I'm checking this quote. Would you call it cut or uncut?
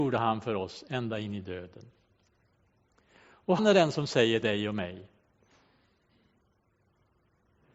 cut